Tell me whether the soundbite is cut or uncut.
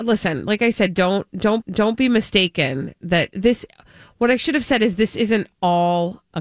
cut